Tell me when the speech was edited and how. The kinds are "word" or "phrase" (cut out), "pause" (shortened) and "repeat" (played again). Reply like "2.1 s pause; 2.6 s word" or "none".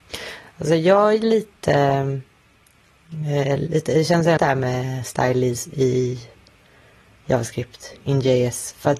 4.4 s word